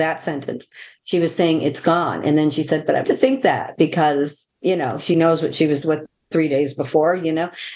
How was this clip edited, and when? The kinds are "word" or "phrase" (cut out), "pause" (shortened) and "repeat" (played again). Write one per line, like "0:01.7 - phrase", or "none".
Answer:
0:03.0 - word
0:04.5 - pause
0:05.8 - word